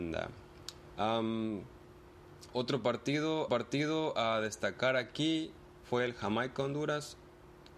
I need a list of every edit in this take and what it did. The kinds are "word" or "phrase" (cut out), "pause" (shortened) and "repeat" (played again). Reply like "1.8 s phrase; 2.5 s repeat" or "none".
3.5 s repeat